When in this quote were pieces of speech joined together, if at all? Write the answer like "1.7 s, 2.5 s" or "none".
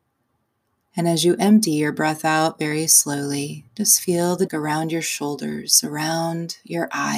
3.7 s, 4.5 s